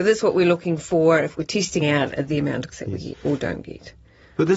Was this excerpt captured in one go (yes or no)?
no